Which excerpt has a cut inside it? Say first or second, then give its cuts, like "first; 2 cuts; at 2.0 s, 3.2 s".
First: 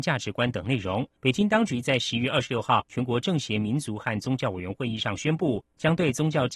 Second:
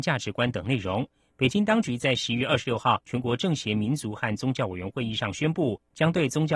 first; 1 cut; at 1.2 s